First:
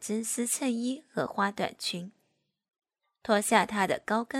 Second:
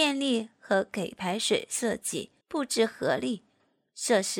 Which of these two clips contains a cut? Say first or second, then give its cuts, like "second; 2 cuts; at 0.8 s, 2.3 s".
second; 1 cut; at 2.4 s